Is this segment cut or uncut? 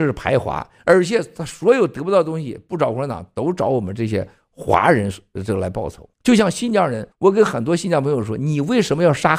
cut